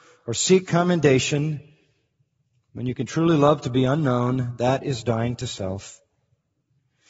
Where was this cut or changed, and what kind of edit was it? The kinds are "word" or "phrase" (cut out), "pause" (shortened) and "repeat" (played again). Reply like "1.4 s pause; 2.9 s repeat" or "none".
none